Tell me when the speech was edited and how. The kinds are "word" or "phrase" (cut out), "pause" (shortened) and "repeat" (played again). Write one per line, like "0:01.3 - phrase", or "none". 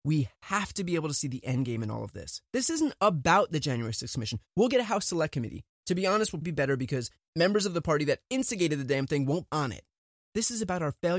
0:05.7 - word
0:06.4 - word
0:09.5 - word